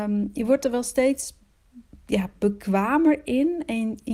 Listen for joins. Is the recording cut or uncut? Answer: uncut